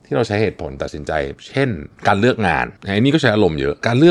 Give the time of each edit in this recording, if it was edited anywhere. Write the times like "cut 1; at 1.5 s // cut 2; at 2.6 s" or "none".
cut 1; at 2.8 s